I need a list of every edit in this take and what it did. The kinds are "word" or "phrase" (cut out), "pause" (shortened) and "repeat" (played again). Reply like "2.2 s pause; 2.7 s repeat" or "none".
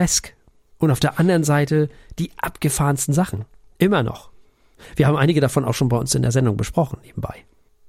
none